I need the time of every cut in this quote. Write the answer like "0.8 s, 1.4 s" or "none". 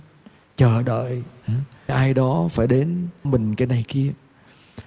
1.9 s, 3.2 s, 3.8 s